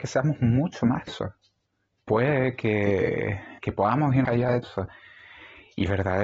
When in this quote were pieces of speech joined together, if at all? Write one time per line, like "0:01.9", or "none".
0:01.1
0:01.9
0:03.6
0:04.2
0:04.6